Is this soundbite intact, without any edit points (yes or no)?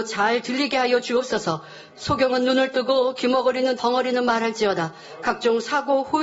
no